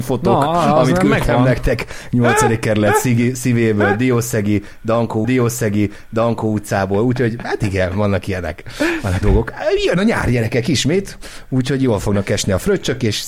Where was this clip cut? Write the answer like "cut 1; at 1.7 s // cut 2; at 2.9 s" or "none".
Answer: cut 1; at 5.2 s // cut 2; at 9.2 s